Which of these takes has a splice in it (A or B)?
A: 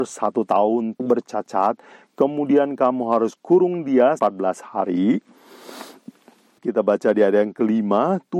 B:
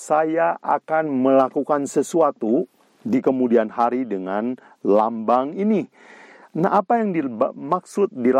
A